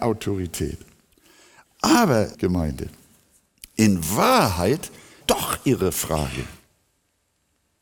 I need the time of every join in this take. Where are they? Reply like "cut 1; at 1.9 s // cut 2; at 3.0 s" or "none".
cut 1; at 2.3 s // cut 2; at 5.2 s